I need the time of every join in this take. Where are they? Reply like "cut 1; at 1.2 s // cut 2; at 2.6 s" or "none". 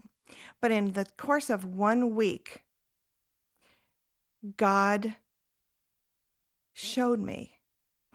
none